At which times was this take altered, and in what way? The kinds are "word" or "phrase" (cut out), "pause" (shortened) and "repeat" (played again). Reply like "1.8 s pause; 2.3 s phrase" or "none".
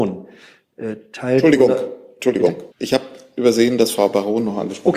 2.7 s pause